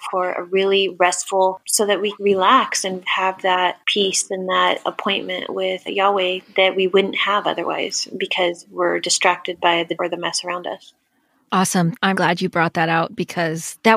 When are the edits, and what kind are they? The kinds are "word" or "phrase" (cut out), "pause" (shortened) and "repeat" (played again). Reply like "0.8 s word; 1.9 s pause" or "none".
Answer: 1.6 s word; 2.1 s word; 3.0 s word; 5.9 s word; 10.0 s word; 12.1 s word